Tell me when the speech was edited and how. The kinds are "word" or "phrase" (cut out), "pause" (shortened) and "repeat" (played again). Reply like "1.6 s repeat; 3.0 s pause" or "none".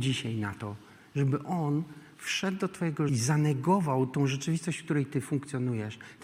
3.1 s phrase